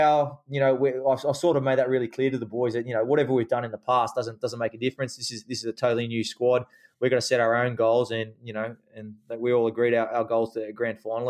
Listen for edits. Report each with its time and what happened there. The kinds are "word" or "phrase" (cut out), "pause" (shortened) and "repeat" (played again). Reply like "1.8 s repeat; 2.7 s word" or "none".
none